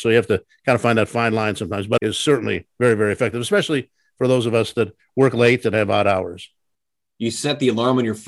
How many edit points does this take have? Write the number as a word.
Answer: one